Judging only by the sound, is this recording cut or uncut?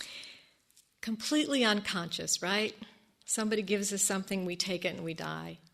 uncut